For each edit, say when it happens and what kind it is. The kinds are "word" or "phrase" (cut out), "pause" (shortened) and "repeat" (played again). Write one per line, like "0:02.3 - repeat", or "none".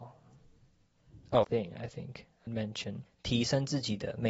0:01.4 - word
0:02.5 - word
0:03.1 - word